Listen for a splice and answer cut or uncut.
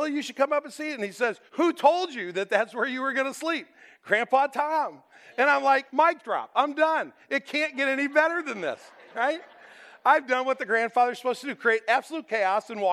cut